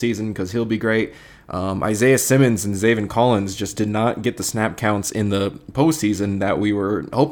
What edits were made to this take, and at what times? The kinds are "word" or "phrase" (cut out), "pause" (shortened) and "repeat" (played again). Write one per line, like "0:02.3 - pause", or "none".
none